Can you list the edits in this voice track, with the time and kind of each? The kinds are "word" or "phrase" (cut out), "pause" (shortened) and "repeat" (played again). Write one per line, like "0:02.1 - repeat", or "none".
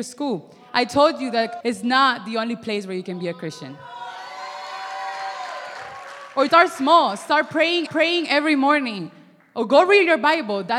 0:01.6 - word
0:06.5 - word
0:07.9 - repeat